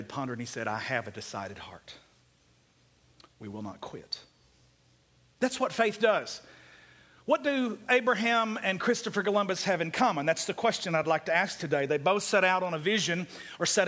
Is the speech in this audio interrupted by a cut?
no; 0 cuts

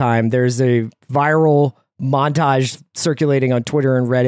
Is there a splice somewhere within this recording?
no; 0 cuts

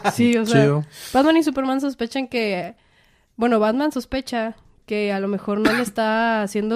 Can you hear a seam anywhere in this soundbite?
no; 0 cuts

